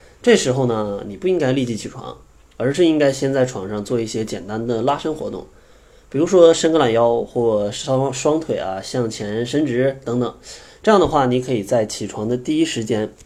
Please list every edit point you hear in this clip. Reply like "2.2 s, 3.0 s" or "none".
none